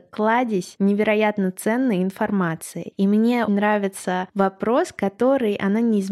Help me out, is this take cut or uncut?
cut